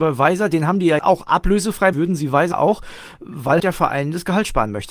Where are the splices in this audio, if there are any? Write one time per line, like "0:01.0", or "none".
0:01.0
0:01.9
0:02.5
0:03.6